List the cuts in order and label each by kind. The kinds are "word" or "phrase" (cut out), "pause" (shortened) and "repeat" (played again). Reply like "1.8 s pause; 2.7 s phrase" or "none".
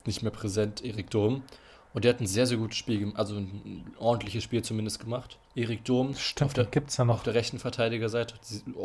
5.4 s pause